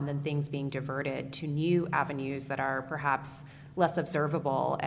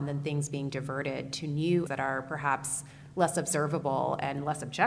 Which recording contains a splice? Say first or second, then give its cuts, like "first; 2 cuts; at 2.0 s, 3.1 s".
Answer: second; 1 cut; at 1.9 s